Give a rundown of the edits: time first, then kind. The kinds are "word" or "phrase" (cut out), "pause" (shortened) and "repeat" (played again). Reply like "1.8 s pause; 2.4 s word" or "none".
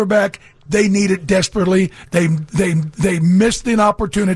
2.7 s repeat